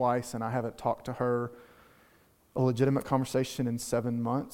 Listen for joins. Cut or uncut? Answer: uncut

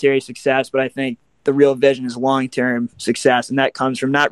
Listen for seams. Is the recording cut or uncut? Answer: uncut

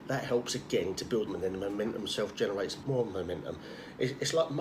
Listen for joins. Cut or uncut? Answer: cut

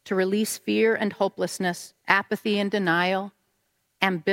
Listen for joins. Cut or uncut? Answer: cut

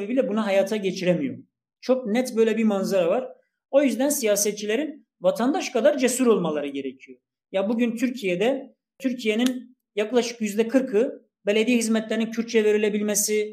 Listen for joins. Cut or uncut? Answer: uncut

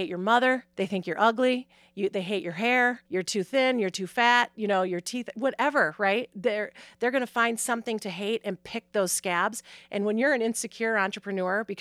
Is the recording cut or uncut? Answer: cut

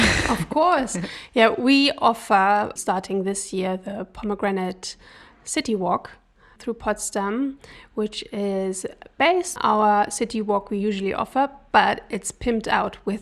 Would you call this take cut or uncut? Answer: cut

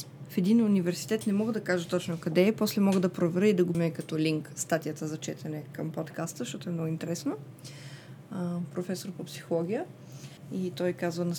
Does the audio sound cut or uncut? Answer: cut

